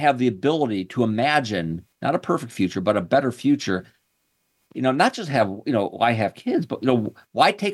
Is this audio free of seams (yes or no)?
yes